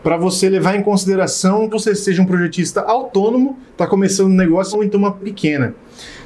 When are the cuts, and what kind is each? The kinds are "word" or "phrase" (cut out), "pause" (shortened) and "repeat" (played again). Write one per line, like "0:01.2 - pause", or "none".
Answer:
0:01.7 - word
0:04.7 - word
0:05.2 - word